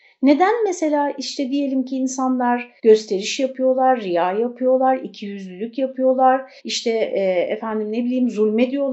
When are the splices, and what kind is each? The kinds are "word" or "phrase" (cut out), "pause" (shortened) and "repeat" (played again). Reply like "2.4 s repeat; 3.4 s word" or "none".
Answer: 2.8 s pause; 6.6 s pause